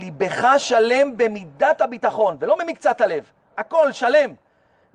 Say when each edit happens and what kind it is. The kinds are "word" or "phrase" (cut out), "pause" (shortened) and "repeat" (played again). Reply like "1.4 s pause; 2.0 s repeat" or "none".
none